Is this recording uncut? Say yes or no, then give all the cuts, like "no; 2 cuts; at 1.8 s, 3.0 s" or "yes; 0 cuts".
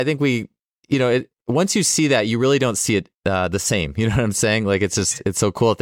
no; 1 cut; at 3.2 s